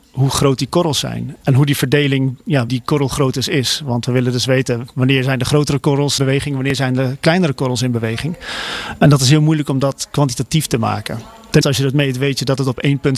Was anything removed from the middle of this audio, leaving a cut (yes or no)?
yes